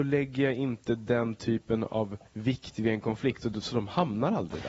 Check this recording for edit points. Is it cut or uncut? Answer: cut